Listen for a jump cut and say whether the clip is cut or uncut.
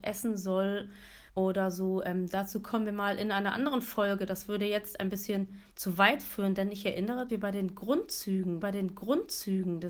cut